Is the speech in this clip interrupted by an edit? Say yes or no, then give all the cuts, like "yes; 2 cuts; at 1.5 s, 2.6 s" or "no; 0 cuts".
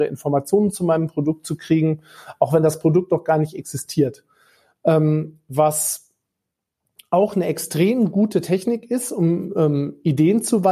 no; 0 cuts